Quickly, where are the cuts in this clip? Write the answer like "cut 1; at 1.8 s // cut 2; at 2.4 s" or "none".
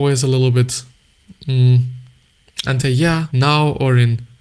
cut 1; at 2.8 s // cut 2; at 3.3 s